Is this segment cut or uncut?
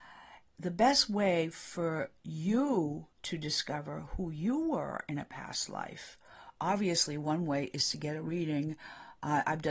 cut